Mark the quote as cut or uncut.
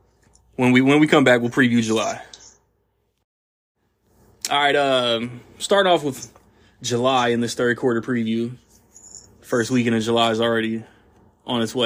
uncut